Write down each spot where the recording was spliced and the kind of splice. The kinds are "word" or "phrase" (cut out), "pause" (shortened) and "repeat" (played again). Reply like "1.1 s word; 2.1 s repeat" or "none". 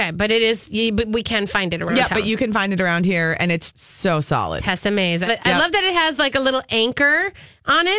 3.7 s word; 5.3 s word